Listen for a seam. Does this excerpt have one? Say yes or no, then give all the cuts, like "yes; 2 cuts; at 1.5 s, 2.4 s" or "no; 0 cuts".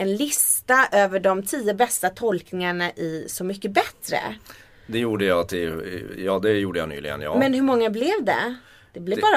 no; 0 cuts